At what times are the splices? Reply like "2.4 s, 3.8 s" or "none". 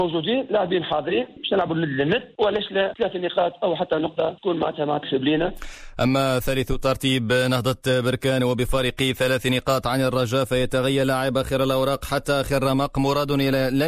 none